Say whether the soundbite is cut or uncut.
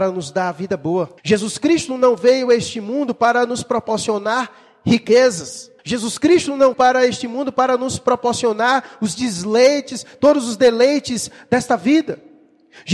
cut